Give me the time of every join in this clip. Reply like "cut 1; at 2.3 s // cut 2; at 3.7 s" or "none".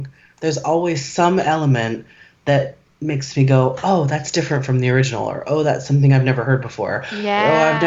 none